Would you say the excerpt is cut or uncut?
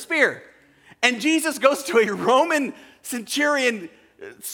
uncut